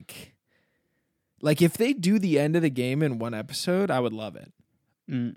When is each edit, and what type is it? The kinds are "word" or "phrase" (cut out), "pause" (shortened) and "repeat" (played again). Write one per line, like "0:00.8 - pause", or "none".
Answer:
none